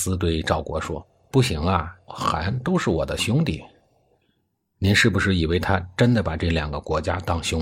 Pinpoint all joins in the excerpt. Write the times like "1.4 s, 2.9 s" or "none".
2.1 s